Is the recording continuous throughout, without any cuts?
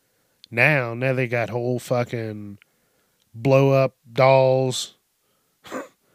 yes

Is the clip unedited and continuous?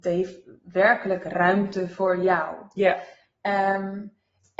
yes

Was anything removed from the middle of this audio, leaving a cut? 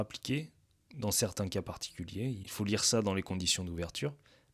no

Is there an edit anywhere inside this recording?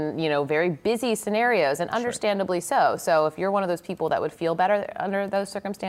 no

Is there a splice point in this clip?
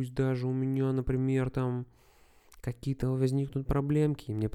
no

